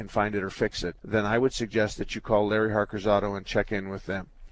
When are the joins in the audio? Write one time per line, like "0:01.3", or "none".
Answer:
0:01.0